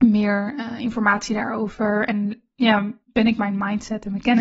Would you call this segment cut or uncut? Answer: cut